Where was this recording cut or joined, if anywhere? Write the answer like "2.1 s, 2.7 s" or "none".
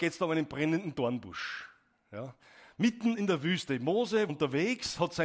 4.3 s